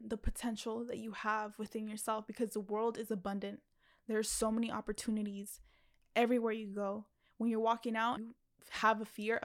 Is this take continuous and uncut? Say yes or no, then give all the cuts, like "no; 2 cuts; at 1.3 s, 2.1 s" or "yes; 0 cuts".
no; 1 cut; at 8.2 s